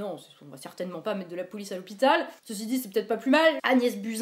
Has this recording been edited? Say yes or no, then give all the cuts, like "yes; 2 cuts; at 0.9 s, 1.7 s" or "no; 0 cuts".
yes; 1 cut; at 2.4 s